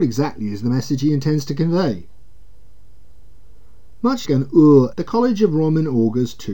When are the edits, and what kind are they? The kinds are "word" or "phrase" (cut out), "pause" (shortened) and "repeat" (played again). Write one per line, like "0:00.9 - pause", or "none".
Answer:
0:04.2 - word
0:04.9 - word